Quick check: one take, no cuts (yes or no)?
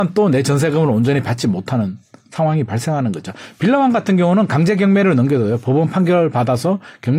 yes